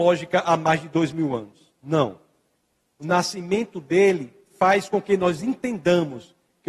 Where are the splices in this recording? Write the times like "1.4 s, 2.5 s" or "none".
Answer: none